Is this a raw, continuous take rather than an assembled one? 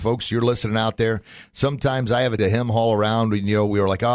no; 1 cut; at 2.4 s

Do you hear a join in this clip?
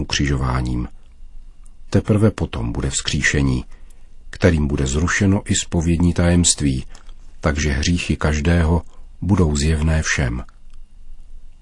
no; 0 cuts

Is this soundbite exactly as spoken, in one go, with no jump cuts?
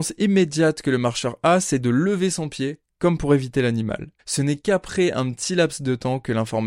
no; 1 cut; at 4.2 s

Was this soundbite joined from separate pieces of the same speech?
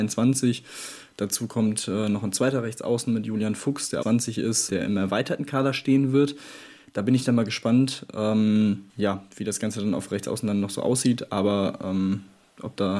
yes; 3 cuts; at 4.0 s, 4.7 s, 8.9 s

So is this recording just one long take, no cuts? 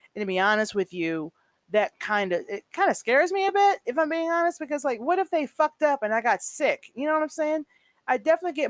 yes; 0 cuts

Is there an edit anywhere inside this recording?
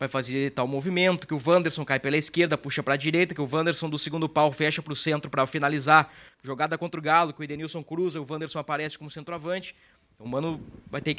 yes; 1 cut; at 6.3 s

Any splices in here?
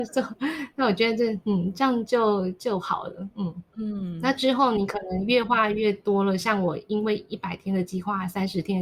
yes; 1 cut; at 3.7 s

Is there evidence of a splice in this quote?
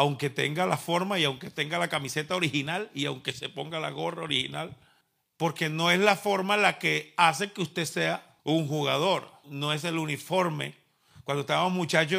yes; 3 cuts; at 5.0 s, 8.4 s, 9.4 s

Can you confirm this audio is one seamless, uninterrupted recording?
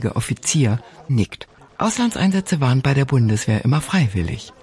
yes; 0 cuts

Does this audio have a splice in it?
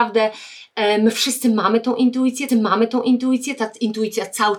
yes; 1 cut; at 2.5 s

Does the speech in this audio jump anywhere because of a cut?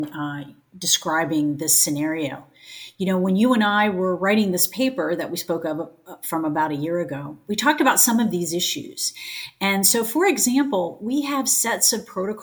no; 0 cuts

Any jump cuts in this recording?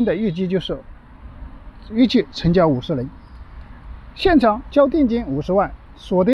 no; 0 cuts

